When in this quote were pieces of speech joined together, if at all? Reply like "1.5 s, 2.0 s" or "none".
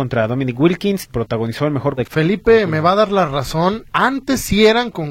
1.1 s, 2.0 s, 3.9 s